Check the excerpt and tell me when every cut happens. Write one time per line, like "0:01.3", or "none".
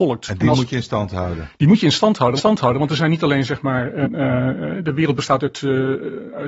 0:02.4
0:04.0